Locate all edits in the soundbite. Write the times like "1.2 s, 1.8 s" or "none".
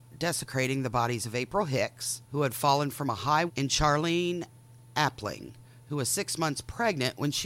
2.2 s, 3.5 s